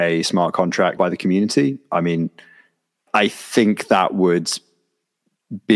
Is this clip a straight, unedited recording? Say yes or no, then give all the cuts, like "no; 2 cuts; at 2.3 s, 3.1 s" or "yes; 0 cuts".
no; 2 cuts; at 1.0 s, 3.1 s